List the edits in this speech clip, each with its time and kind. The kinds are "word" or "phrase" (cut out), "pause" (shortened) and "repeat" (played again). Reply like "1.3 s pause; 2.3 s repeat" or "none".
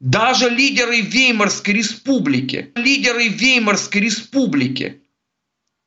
2.8 s repeat